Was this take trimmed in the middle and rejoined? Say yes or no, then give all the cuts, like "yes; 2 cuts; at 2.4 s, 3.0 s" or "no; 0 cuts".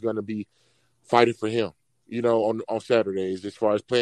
no; 0 cuts